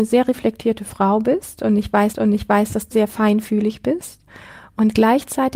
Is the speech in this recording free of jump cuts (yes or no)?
no